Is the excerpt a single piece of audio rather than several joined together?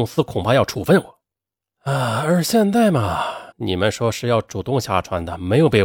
no; 1 cut; at 3.5 s

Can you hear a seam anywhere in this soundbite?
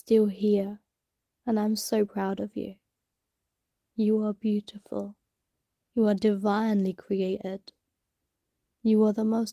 no; 0 cuts

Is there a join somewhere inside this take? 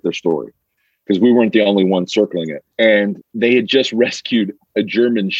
yes; 1 cut; at 2.7 s

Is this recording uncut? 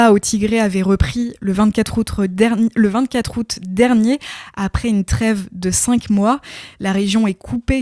yes; 0 cuts

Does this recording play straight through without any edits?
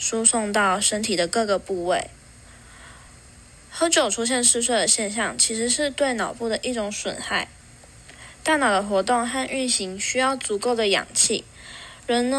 yes; 0 cuts

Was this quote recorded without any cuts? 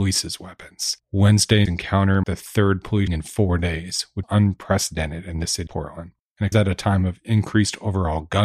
no; 6 cuts; at 1.7 s, 2.2 s, 3.1 s, 4.2 s, 5.7 s, 6.5 s

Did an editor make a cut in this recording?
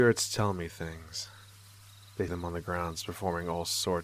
yes; 1 cut; at 2.3 s

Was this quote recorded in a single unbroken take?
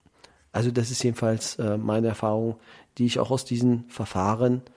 yes; 0 cuts

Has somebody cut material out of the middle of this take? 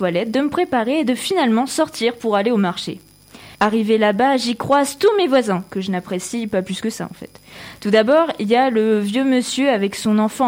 yes; 1 cut; at 3.5 s

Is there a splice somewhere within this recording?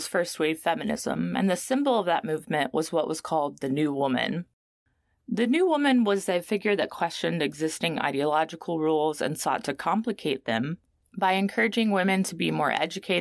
no; 0 cuts

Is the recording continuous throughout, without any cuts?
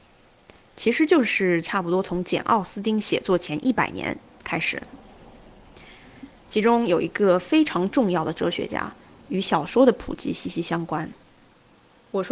yes; 0 cuts

